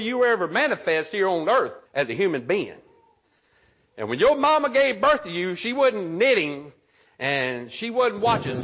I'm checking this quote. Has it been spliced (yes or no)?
yes